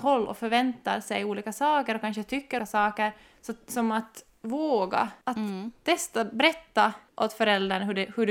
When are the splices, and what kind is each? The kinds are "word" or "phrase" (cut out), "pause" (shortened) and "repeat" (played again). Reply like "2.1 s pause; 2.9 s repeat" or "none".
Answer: 2.6 s word